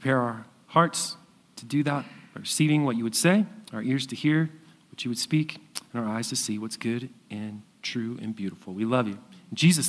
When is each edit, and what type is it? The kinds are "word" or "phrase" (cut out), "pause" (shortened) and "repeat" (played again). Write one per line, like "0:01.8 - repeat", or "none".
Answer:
none